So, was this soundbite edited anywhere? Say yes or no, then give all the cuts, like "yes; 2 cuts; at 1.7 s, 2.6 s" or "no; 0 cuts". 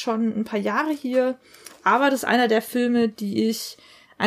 no; 0 cuts